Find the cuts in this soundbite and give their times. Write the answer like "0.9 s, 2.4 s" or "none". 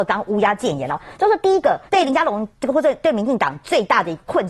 1.9 s, 2.5 s